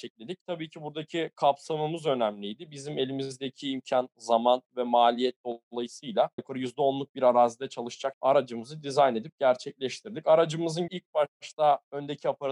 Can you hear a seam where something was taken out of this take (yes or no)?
yes